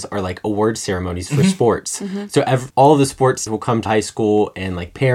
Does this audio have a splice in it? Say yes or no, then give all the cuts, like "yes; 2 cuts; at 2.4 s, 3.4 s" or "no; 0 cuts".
yes; 3 cuts; at 2.7 s, 3.5 s, 3.9 s